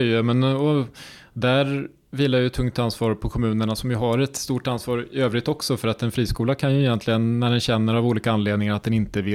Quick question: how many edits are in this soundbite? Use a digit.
0